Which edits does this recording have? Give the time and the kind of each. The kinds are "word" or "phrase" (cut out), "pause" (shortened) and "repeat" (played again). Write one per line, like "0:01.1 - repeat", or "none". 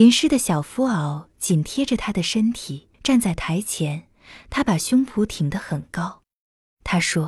0:02.9 - pause